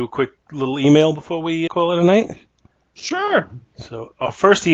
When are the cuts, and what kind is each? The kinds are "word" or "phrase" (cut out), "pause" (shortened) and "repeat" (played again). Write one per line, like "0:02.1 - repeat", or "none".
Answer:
0:01.7 - word
0:03.7 - pause